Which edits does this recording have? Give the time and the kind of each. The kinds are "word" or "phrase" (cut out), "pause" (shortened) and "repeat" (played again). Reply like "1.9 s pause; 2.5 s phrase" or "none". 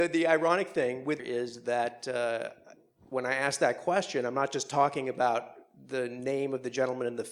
1.2 s phrase